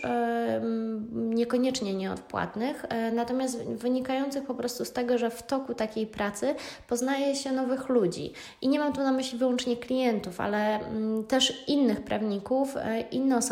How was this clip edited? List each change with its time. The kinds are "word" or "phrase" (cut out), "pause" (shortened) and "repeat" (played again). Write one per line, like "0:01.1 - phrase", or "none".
none

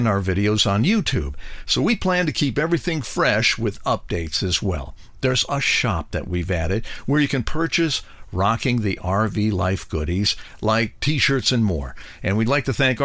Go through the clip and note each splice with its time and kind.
0:05.5 - word

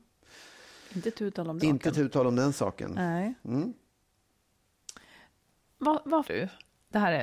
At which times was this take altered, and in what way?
0:01.6 - word
0:06.2 - word

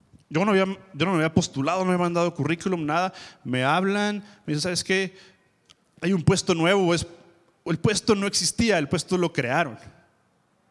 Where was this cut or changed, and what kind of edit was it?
none

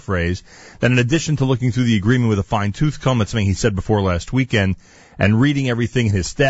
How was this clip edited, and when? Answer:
none

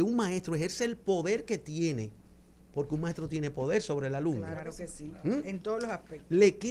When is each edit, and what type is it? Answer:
none

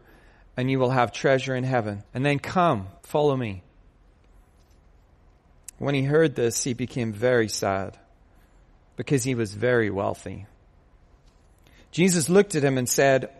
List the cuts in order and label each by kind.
0:02.0 - pause
0:03.0 - pause

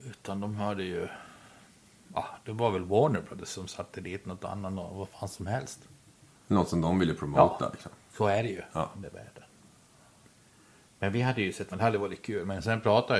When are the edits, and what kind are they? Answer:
0:11.7 - word

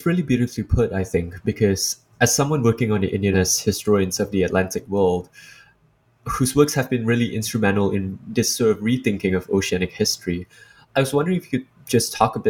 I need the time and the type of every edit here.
0:02.1 - word
0:03.3 - phrase

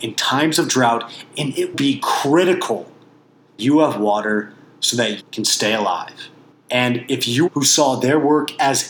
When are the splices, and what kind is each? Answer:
0:01.7 - word
0:03.6 - word
0:05.2 - word
0:06.5 - pause
0:07.5 - phrase

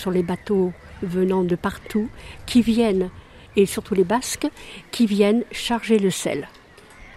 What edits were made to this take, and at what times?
none

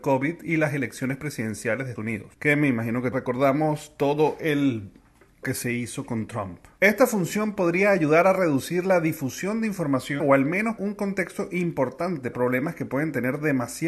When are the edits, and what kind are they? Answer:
0:02.0 - word
0:03.1 - word
0:05.4 - word
0:10.2 - word
0:10.8 - word
0:12.3 - word

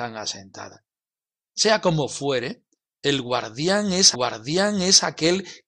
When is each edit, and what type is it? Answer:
0:04.1 - repeat

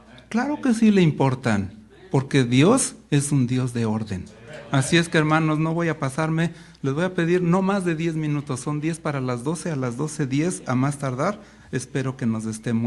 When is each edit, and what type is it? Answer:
none

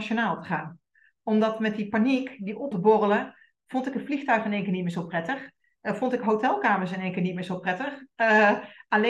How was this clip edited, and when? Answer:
0:02.7 - word

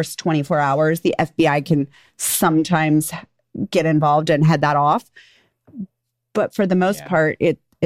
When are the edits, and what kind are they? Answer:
none

